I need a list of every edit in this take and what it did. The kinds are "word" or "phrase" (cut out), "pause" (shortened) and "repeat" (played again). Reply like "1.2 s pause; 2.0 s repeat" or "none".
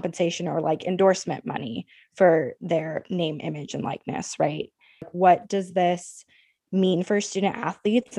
none